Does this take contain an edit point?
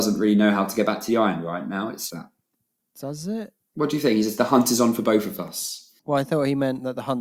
yes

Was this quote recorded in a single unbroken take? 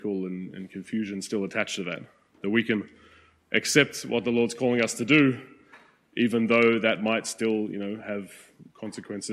yes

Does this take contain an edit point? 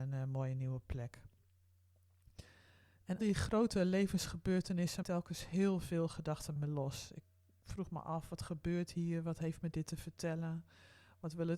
yes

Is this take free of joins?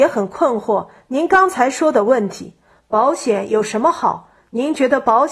yes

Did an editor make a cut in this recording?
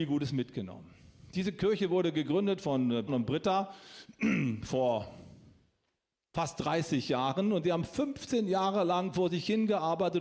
yes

